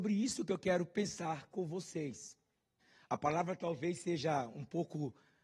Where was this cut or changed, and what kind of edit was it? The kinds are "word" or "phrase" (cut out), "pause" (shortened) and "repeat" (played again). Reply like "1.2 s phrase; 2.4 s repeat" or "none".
2.8 s pause